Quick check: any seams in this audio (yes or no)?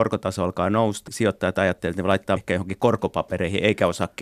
yes